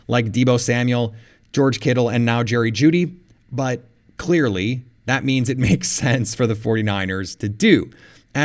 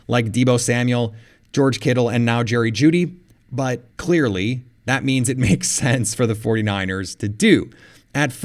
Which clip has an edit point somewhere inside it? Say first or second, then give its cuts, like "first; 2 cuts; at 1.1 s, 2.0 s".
second; 1 cut; at 3.9 s